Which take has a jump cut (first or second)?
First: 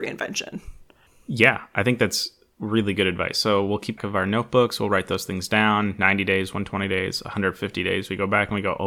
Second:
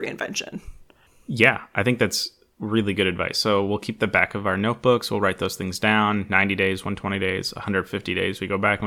first